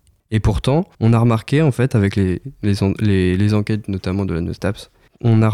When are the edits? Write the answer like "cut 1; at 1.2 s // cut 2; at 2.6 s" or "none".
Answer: cut 1; at 0.9 s